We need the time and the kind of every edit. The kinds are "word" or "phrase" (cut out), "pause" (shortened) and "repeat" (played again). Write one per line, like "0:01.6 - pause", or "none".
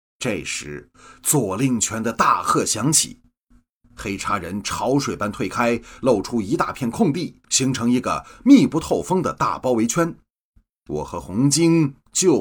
0:07.4 - pause

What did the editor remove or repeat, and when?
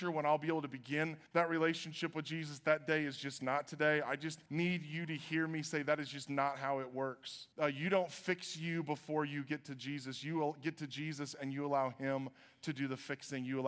0:01.3 - pause
0:04.5 - pause
0:07.5 - pause

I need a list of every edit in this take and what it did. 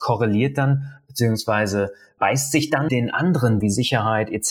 0:02.2 - word
0:02.9 - word
0:03.6 - phrase

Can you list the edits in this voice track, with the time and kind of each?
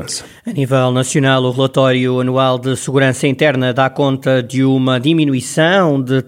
none

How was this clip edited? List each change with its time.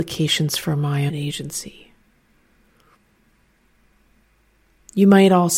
0:01.1 - phrase

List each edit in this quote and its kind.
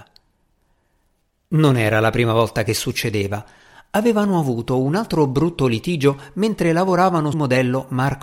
0:07.3 - word

